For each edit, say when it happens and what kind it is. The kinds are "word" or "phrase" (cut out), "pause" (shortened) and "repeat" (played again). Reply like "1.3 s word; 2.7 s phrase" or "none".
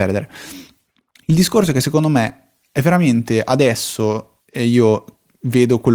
4.4 s pause